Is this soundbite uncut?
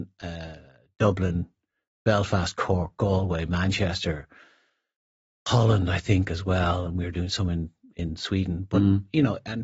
yes; 0 cuts

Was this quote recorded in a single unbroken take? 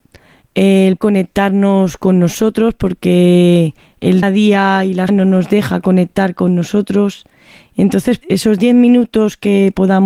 no; 4 cuts; at 1.0 s, 4.2 s, 5.1 s, 8.2 s

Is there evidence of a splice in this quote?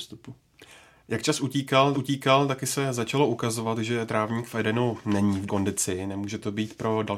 yes; 2 cuts; at 1.9 s, 5.5 s

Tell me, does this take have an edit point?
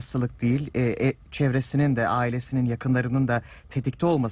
no; 0 cuts

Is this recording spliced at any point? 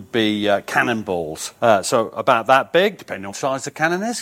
yes; 2 cuts; at 1.6 s, 3.3 s

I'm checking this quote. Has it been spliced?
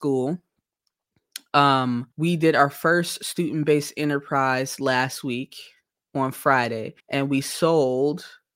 yes; 2 cuts; at 2.1 s, 7.0 s

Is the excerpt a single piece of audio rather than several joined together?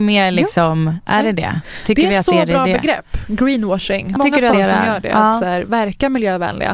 no; 3 cuts; at 4.2 s, 4.5 s, 5.7 s

